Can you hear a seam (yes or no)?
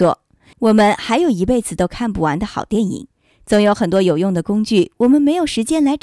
yes